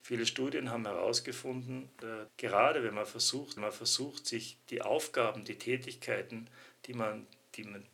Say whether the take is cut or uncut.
cut